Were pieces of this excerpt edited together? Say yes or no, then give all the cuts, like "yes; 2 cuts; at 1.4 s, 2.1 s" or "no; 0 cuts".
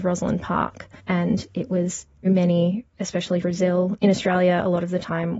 yes; 3 cuts; at 1.0 s, 2.2 s, 3.4 s